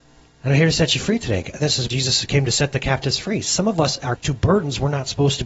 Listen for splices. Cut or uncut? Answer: cut